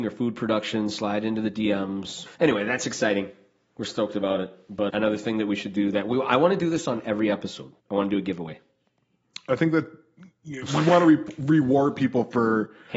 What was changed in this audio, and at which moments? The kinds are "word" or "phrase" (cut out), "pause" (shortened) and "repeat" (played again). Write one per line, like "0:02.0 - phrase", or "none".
0:02.4 - pause
0:04.9 - word
0:07.8 - pause